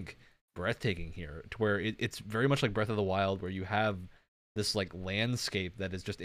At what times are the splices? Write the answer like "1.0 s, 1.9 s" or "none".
none